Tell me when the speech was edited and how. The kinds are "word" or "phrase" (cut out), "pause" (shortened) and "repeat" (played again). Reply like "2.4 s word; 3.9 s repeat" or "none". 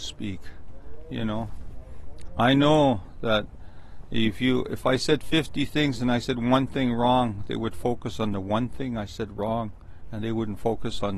none